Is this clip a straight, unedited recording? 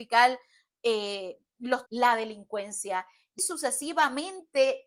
no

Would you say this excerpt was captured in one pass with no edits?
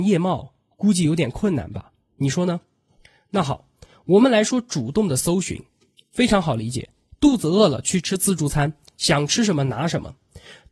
yes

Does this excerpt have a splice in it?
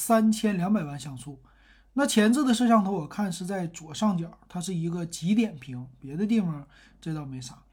no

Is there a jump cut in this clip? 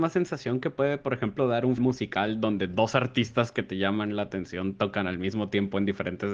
yes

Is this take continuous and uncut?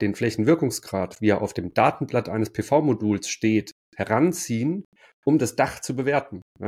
yes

